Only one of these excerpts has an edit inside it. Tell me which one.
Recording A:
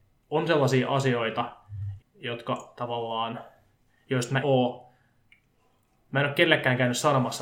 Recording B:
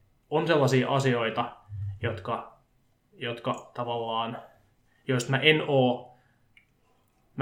A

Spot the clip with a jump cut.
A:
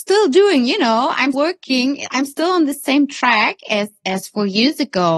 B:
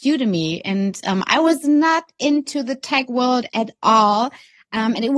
A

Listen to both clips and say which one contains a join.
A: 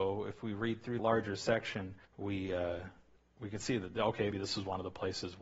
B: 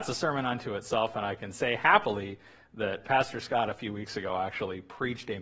A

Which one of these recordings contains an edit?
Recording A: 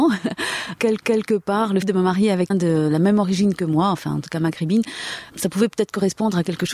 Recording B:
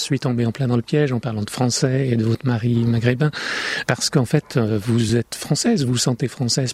A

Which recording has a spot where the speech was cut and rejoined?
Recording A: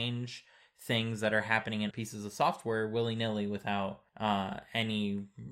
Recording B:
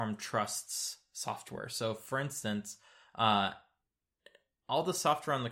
A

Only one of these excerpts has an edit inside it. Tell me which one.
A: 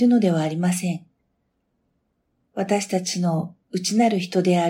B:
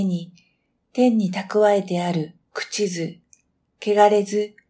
B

